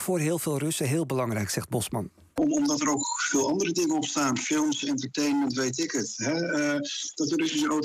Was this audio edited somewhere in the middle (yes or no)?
no